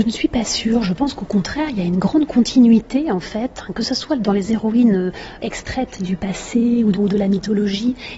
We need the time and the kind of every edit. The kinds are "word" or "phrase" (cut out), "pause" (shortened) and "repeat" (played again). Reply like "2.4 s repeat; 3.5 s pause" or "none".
5.4 s word; 6.9 s word